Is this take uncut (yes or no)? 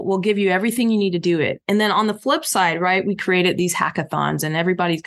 yes